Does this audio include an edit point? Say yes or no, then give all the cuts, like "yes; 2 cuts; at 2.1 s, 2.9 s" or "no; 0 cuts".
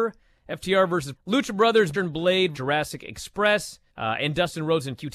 yes; 4 cuts; at 1.1 s, 1.9 s, 2.5 s, 3.9 s